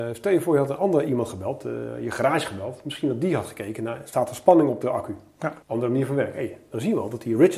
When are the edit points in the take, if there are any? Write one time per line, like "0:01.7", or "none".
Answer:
0:05.6